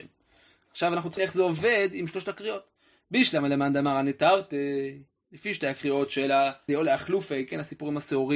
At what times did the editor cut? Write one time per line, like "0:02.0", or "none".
0:01.2
0:06.7